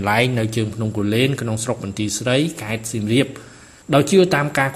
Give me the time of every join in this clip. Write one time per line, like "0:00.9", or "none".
none